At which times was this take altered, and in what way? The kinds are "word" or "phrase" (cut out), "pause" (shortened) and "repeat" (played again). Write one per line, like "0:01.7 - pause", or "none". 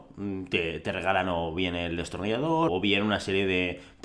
0:02.7 - word